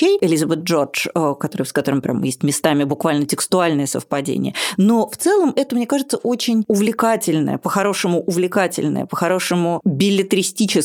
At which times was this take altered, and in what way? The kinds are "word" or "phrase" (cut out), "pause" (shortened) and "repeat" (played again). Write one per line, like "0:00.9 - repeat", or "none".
none